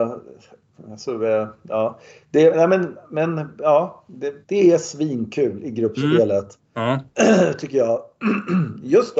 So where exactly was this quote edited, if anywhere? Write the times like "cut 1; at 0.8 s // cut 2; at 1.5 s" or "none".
cut 1; at 4.4 s